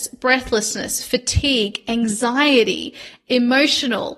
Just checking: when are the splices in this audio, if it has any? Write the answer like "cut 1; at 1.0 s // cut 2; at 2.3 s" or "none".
none